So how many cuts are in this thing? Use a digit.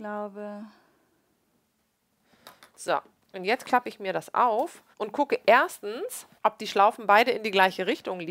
3